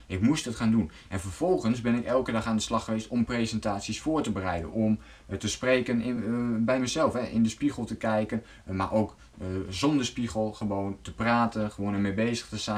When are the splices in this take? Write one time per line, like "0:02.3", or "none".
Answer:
none